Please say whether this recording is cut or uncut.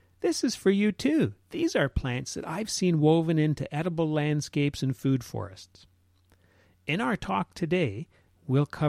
cut